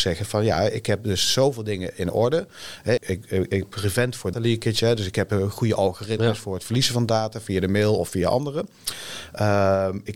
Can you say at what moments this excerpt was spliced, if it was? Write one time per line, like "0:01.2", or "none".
0:03.0
0:04.3